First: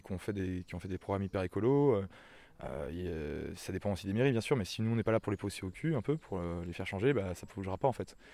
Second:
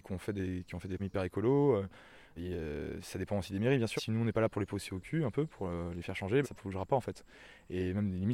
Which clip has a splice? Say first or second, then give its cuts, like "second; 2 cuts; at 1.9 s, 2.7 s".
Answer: second; 4 cuts; at 1.0 s, 2.4 s, 4.0 s, 6.4 s